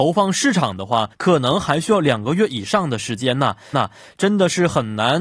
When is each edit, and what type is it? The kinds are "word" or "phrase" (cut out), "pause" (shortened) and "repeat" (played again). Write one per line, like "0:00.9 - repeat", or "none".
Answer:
0:01.1 - pause
0:03.7 - repeat